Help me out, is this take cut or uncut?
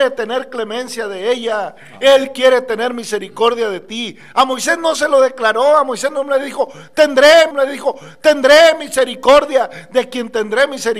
cut